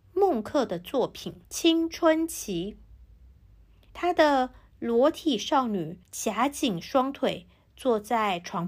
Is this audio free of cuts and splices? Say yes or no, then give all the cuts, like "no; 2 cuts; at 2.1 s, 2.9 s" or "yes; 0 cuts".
no; 3 cuts; at 1.4 s, 3.9 s, 6.0 s